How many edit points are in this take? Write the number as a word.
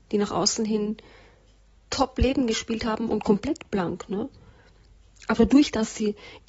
two